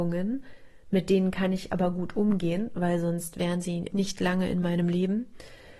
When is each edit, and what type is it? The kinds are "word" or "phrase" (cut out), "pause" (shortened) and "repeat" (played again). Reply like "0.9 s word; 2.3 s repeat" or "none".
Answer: 3.9 s word